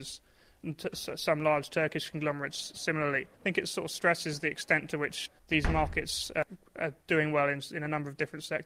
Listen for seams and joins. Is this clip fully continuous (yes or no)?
no